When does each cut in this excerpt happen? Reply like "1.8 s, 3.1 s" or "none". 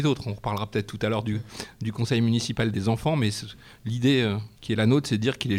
4.6 s